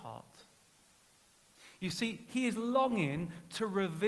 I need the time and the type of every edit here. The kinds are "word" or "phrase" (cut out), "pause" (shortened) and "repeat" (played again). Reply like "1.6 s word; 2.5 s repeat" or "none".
none